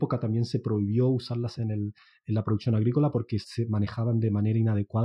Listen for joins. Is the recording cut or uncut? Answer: cut